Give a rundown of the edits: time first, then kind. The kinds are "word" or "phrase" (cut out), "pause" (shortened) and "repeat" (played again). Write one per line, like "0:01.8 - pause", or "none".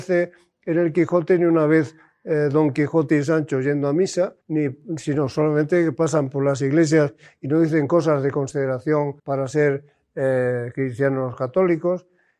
0:04.4 - pause
0:09.2 - pause